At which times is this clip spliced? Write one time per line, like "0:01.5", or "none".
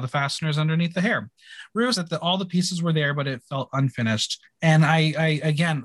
0:01.9
0:04.4